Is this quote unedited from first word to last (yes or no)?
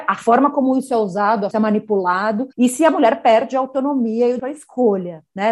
no